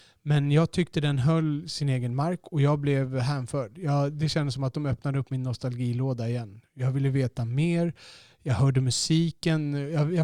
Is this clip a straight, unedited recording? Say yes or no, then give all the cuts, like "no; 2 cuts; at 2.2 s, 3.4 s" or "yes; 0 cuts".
yes; 0 cuts